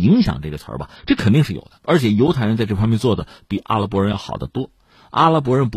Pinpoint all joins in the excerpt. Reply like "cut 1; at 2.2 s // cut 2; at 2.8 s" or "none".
cut 1; at 1.8 s